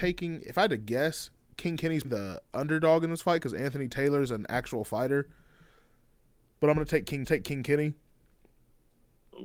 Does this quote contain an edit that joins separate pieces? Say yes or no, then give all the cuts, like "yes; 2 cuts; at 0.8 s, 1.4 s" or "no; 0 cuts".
yes; 2 cuts; at 2.0 s, 7.2 s